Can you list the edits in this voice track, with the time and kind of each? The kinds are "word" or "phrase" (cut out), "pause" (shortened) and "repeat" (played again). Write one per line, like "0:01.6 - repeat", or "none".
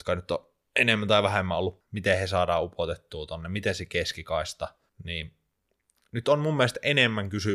0:01.8 - word
0:04.9 - pause